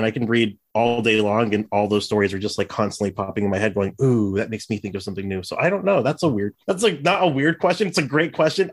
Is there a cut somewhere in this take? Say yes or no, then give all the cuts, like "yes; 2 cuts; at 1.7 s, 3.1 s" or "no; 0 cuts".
yes; 1 cut; at 6.6 s